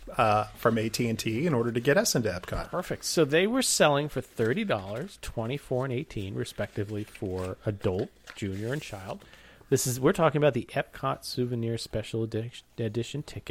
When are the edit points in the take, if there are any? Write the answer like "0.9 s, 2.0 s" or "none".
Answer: none